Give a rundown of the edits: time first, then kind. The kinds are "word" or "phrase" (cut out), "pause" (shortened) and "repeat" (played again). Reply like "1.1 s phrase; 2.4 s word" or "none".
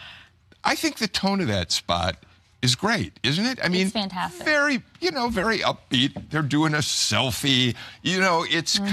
none